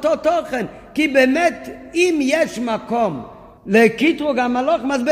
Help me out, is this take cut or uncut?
cut